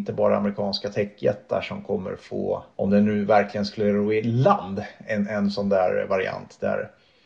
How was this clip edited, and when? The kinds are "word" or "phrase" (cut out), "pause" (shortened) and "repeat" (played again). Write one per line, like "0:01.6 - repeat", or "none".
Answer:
0:02.7 - pause